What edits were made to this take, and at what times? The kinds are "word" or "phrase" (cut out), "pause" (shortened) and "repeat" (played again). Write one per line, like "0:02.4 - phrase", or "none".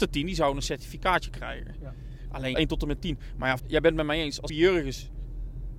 0:02.5 - phrase
0:03.6 - word
0:04.5 - word

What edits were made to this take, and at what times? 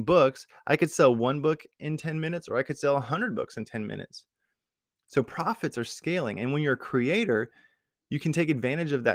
none

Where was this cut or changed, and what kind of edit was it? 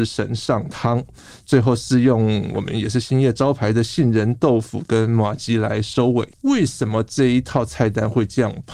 0:06.3 - pause

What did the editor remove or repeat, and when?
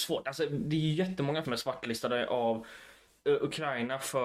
0:01.4 - phrase

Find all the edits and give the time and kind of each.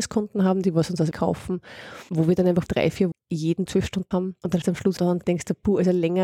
0:01.1 - word
0:02.7 - word
0:03.1 - word
0:03.7 - word
0:04.1 - word
0:04.6 - word
0:05.0 - word

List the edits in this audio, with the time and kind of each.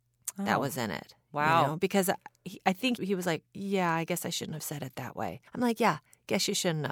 0:03.0 - word
0:03.5 - pause
0:05.5 - pause

